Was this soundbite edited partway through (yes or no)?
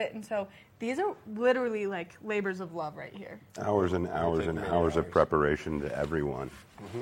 yes